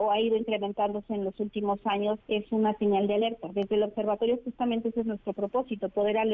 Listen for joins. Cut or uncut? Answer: cut